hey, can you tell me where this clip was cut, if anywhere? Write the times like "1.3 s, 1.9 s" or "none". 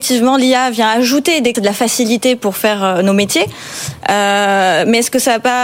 1.5 s